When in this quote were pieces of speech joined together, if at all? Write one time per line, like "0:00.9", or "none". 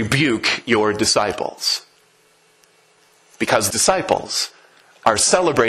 0:03.7